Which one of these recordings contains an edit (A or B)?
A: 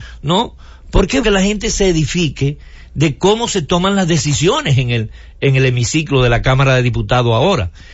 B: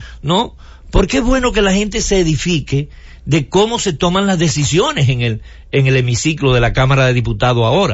A